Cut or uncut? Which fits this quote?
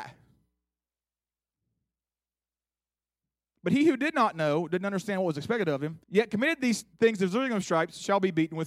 cut